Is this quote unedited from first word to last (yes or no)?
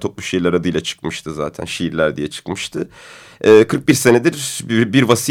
yes